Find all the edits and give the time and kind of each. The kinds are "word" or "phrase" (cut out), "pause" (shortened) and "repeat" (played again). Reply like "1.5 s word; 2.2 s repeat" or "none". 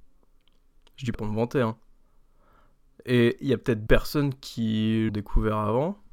1.1 s word; 3.9 s word; 5.1 s word